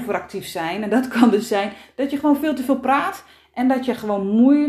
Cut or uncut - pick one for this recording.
uncut